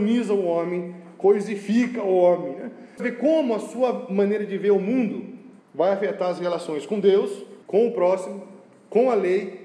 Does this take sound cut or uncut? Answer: cut